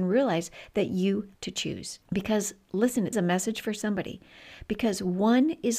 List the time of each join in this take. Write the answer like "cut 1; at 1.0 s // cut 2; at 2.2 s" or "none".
cut 1; at 1.3 s // cut 2; at 2.0 s // cut 3; at 3.1 s